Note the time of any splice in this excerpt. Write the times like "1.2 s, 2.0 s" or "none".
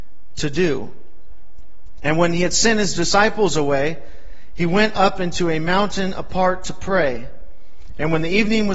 none